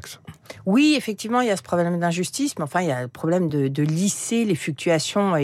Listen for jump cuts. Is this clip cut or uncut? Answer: uncut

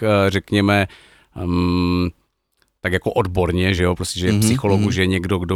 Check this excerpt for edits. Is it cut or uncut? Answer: uncut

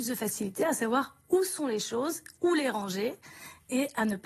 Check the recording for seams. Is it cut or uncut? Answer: uncut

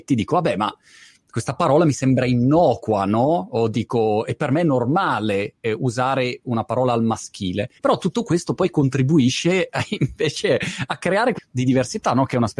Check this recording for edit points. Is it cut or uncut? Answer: cut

